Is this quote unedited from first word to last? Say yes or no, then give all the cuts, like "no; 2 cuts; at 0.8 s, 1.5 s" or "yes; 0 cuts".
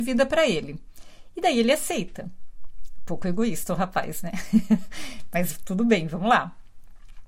yes; 0 cuts